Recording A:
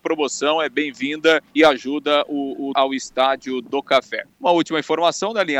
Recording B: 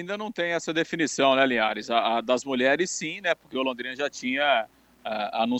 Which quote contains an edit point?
A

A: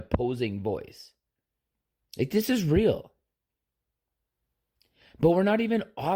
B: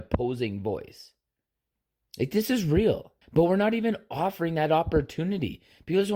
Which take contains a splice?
B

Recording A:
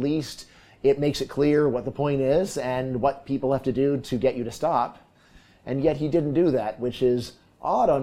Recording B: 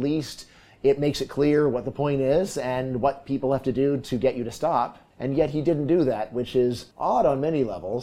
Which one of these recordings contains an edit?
B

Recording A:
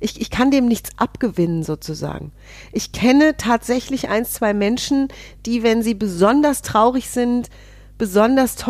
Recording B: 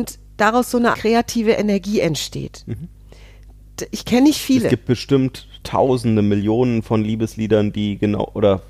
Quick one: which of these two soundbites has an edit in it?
B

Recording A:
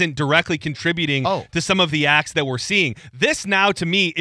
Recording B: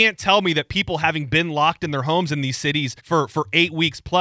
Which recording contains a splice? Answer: B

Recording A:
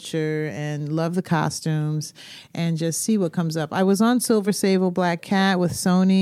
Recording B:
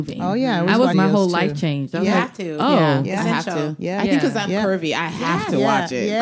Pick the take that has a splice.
B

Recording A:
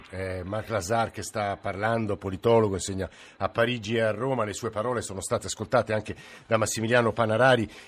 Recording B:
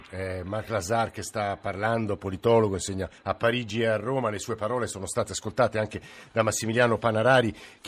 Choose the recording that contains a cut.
B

